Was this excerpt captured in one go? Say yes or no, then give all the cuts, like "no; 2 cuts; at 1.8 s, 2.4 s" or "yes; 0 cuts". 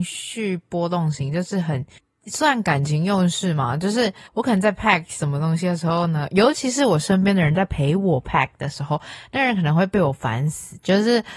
yes; 0 cuts